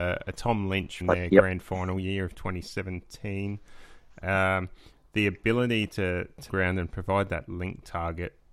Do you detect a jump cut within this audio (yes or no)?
yes